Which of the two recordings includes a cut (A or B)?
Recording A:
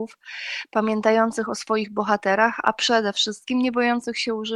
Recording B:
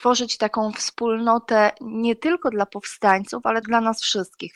B